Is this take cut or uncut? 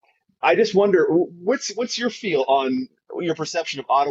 uncut